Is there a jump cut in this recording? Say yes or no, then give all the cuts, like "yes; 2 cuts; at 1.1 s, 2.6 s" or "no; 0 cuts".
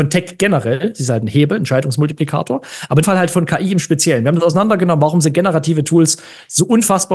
yes; 1 cut; at 3.0 s